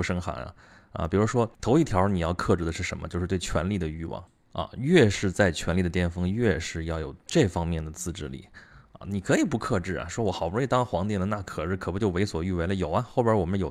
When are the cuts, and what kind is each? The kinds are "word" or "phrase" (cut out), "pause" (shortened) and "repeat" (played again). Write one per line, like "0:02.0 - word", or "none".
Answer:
0:01.5 - pause